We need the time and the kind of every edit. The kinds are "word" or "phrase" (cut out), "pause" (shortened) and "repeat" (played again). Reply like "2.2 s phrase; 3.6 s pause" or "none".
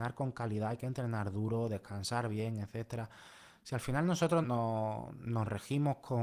4.4 s word

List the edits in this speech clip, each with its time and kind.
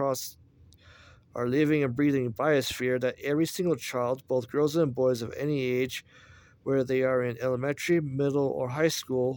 none

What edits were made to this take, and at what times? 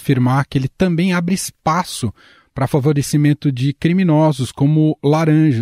none

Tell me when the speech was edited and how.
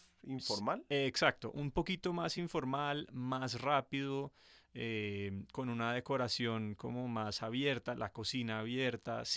none

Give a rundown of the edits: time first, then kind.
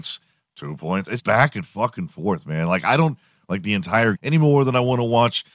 1.2 s word; 3.4 s phrase; 4.1 s phrase

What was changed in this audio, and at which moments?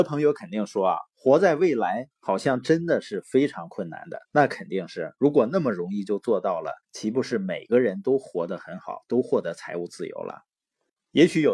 2.1 s pause; 4.2 s pause; 6.8 s pause

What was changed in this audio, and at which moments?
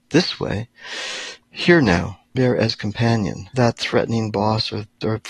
1.4 s pause; 2.4 s word; 3.5 s word

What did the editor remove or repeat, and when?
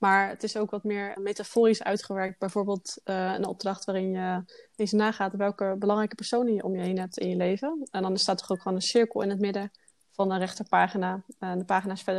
1.2 s word

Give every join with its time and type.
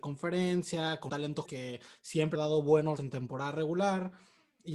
1.1 s word; 1.4 s word; 2.3 s word; 3.0 s word

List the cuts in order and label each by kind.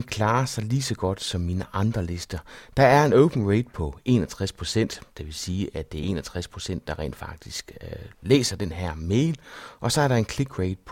none

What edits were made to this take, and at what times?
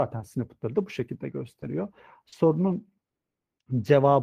none

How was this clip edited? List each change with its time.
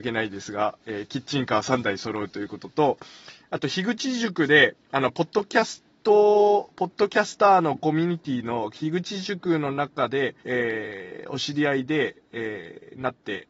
10.4 s pause

